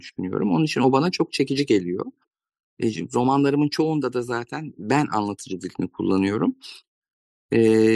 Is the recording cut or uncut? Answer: uncut